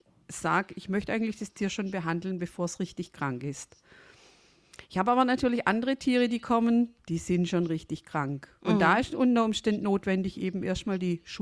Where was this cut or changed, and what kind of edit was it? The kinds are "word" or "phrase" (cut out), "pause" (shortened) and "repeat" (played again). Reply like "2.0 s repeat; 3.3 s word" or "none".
8.6 s pause